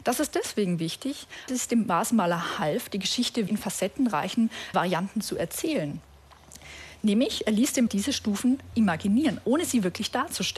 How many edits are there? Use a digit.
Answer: 5